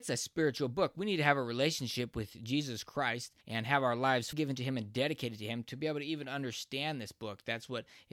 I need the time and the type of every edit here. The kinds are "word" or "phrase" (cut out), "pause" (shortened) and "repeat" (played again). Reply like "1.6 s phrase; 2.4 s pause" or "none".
3.4 s pause; 4.3 s word